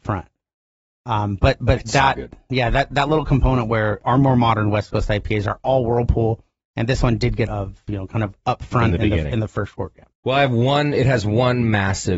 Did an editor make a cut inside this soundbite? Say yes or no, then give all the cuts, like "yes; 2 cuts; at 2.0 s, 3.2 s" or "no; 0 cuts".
yes; 3 cuts; at 4.0 s, 7.5 s, 10.1 s